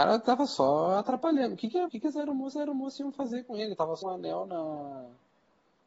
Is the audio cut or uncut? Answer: cut